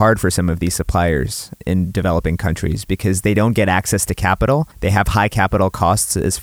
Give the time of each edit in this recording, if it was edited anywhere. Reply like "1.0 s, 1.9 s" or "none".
4.7 s